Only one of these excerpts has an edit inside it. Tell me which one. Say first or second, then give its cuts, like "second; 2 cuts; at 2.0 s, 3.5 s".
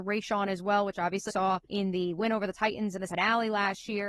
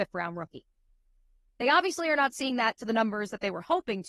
first; 3 cuts; at 1.3 s, 1.6 s, 3.1 s